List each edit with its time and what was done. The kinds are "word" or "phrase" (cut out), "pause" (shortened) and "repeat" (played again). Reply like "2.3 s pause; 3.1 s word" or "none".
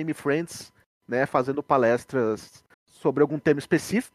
2.7 s pause